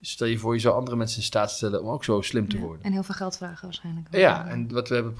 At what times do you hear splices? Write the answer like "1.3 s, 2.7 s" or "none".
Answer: none